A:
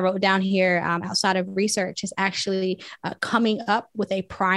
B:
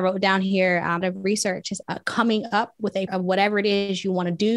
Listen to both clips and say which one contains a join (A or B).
B